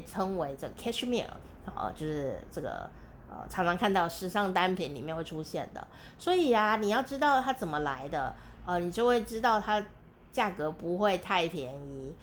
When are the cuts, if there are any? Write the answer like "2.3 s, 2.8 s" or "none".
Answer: none

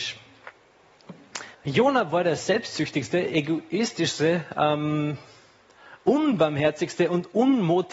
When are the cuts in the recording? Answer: 1.5 s

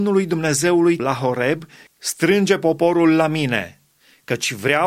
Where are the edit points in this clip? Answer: 1.0 s, 1.9 s

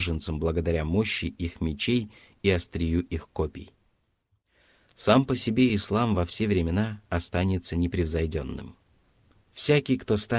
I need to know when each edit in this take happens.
none

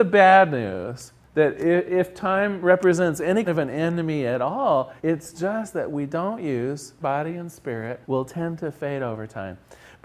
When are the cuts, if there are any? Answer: 1.2 s, 3.5 s, 5.0 s, 5.7 s, 7.0 s, 8.0 s

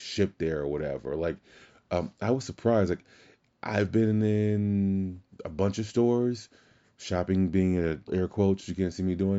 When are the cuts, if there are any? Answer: 5.3 s, 8.1 s

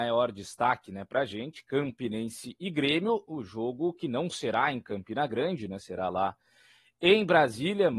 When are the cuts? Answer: none

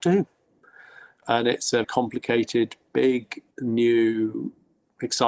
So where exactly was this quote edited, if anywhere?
1.2 s, 1.8 s, 3.5 s

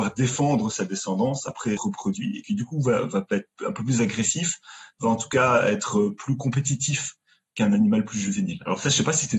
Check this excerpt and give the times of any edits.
1.8 s

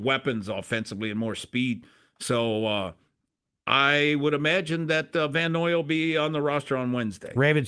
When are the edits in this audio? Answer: none

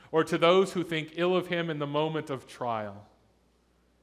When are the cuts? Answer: none

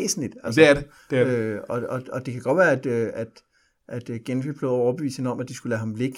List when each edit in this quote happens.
none

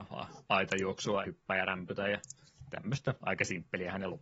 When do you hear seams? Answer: 1.2 s

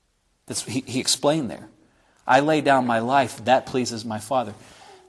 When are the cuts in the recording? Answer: none

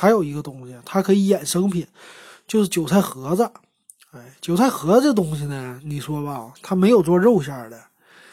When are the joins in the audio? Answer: none

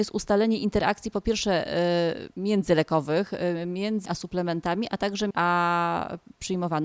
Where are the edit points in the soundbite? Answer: 2.3 s, 4.1 s, 5.3 s

